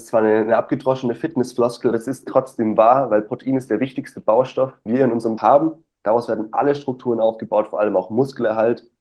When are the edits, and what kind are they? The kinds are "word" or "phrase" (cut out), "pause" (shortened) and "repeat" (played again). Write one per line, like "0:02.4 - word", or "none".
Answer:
0:01.9 - word
0:04.9 - word
0:05.4 - word

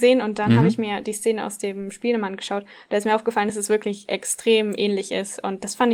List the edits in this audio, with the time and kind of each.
none

